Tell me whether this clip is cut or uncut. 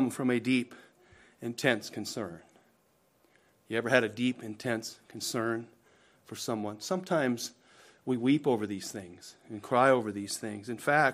uncut